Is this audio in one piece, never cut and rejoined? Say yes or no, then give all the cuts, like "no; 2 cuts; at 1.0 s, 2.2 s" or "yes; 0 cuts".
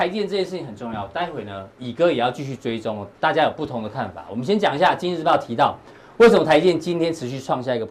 yes; 0 cuts